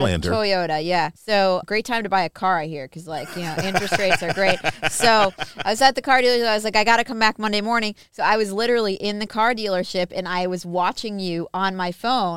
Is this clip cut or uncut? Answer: cut